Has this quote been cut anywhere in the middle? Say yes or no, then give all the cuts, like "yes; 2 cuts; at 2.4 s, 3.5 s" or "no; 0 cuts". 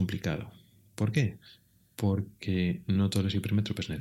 no; 0 cuts